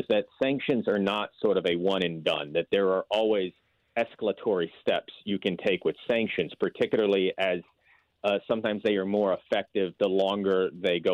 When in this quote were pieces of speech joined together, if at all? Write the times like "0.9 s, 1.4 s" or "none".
none